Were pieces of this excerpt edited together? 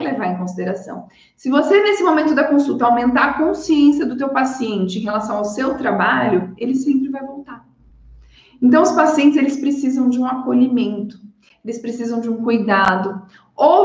no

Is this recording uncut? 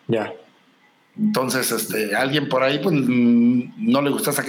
yes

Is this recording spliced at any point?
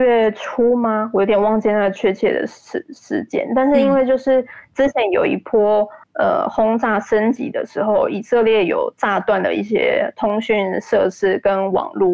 yes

